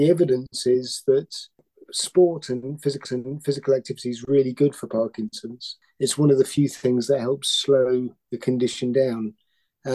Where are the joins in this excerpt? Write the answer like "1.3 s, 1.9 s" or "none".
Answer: 3.0 s, 8.2 s